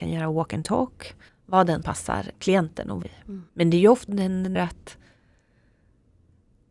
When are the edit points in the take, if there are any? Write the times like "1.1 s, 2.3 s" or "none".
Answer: 1.3 s, 1.8 s, 2.3 s, 3.0 s, 3.5 s, 4.1 s, 4.6 s